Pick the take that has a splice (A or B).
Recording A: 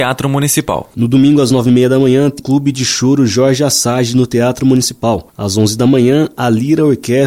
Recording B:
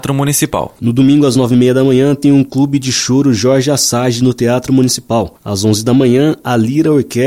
A